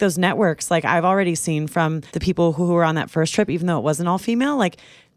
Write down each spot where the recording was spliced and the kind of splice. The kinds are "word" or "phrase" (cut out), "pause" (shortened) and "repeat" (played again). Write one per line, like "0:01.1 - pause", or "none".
0:02.1 - pause